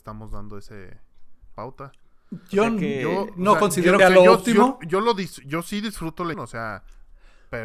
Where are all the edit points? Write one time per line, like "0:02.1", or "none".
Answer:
0:01.5
0:04.0
0:06.3